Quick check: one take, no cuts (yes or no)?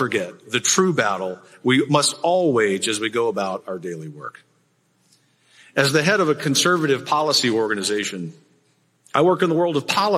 yes